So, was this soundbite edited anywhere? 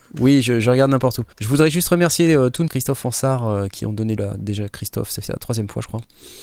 yes; 3 cuts; at 1.3 s, 2.7 s, 4.2 s

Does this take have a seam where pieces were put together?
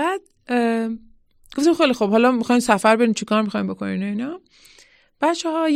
no; 0 cuts

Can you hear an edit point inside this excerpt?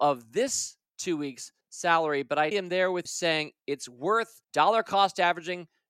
yes; 4 cuts; at 1.6 s, 2.5 s, 3.1 s, 4.4 s

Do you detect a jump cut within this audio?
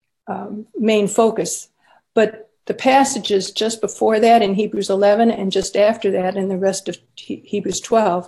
no; 0 cuts

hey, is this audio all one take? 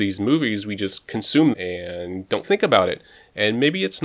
no; 2 cuts; at 1.5 s, 2.4 s

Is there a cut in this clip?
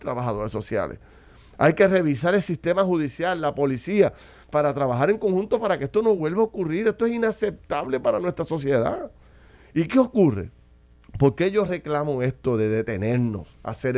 no; 0 cuts

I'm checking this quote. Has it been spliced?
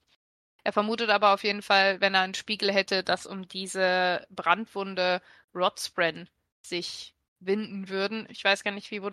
no; 0 cuts

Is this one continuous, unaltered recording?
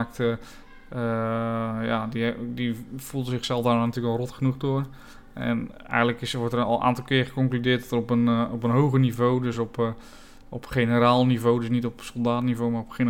yes; 0 cuts

